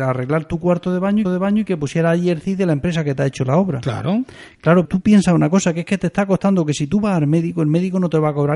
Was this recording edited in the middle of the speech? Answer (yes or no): yes